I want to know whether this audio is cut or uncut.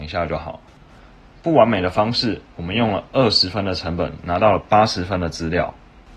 uncut